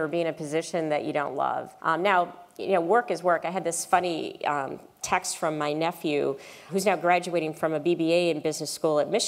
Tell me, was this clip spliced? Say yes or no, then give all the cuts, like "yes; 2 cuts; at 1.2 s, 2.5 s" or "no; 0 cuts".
yes; 3 cuts; at 1.8 s, 5.0 s, 6.7 s